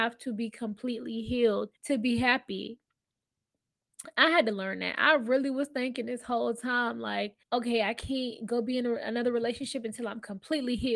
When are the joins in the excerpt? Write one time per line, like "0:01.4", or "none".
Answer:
0:01.7
0:07.4